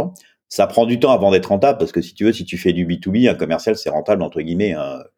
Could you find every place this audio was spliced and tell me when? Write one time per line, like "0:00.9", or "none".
none